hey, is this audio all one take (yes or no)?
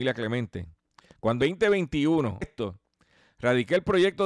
no